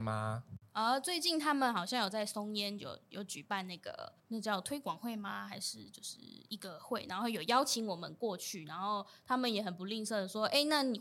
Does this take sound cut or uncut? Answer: cut